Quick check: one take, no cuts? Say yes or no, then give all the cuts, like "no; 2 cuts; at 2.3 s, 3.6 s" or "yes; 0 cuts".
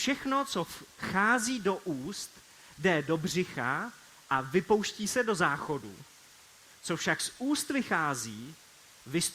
yes; 0 cuts